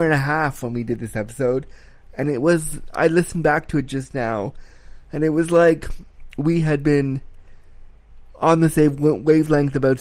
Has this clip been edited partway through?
no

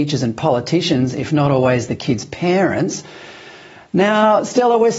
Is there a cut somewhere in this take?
no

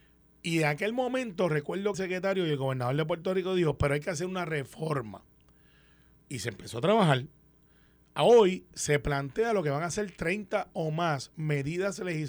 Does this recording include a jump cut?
yes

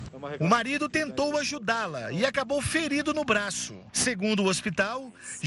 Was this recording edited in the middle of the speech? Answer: no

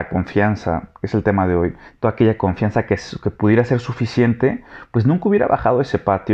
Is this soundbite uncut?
yes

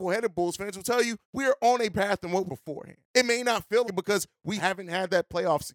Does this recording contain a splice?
yes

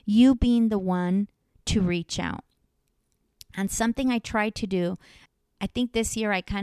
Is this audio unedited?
yes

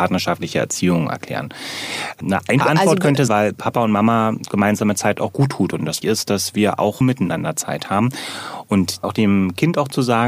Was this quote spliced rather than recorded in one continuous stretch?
yes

